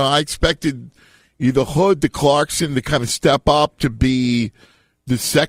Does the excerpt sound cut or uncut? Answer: uncut